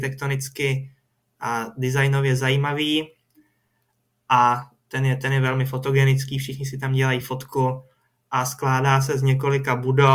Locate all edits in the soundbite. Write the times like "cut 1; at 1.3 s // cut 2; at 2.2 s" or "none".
none